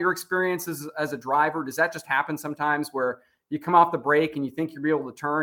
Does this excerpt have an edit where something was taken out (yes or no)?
no